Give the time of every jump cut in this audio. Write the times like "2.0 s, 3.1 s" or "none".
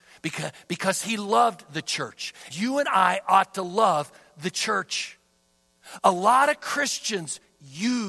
2.5 s